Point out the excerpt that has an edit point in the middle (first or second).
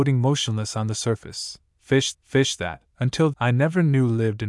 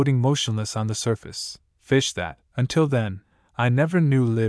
first